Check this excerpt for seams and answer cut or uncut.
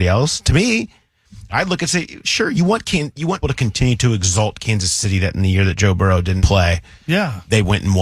cut